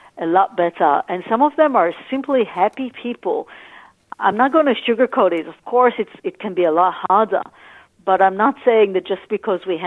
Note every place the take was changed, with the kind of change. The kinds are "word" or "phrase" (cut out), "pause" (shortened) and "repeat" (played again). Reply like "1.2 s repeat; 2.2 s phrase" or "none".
none

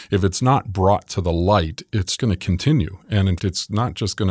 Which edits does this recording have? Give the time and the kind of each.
2.2 s word; 3.4 s word

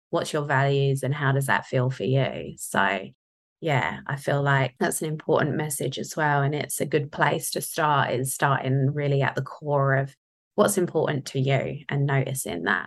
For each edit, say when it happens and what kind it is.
none

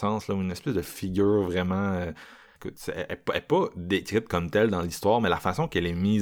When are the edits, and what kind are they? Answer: none

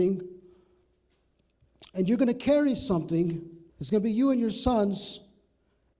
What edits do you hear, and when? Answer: 3.7 s pause

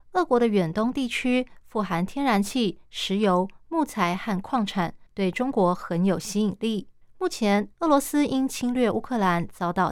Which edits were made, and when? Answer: 5.1 s pause; 7.0 s pause; 7.7 s pause

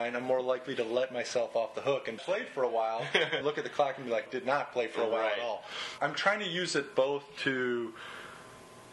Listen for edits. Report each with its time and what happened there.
2.2 s phrase; 3.4 s word; 4.3 s phrase; 6.0 s word

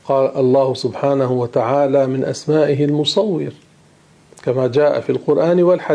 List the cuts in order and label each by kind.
none

